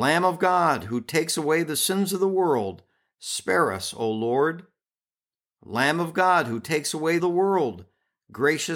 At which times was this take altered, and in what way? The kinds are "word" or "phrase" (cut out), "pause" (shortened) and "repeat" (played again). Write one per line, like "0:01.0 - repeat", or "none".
0:07.2 - phrase

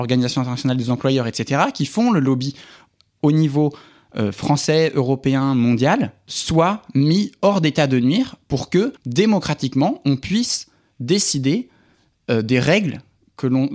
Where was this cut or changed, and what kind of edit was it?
0:09.0 - pause

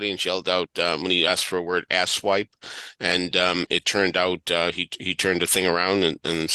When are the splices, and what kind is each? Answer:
none

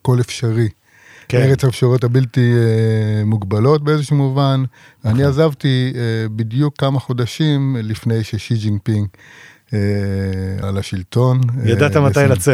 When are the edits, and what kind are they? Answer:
0:10.6 - word

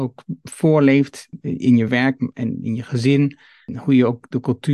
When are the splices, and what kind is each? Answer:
none

